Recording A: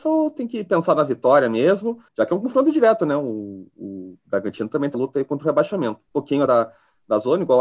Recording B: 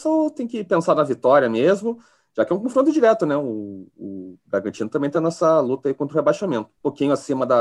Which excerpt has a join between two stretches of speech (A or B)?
A